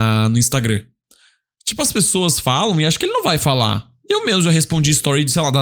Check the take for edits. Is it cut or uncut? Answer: uncut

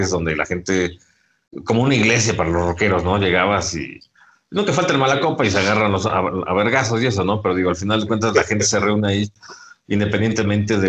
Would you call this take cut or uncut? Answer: uncut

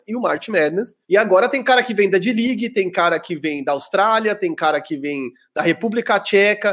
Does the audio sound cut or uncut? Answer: cut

